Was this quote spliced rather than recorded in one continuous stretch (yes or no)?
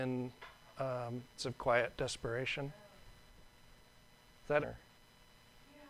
yes